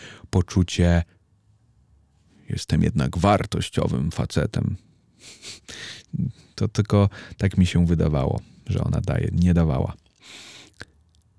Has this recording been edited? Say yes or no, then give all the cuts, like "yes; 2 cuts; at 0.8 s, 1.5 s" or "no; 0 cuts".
no; 0 cuts